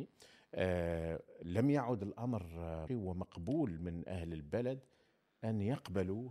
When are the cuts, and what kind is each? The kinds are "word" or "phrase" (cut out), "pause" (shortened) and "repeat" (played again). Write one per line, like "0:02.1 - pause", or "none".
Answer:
0:02.9 - word